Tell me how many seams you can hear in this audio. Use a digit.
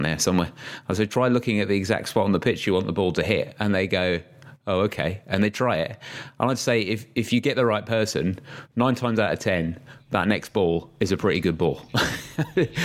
0